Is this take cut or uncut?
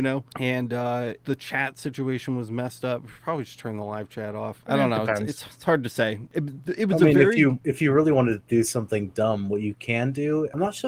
uncut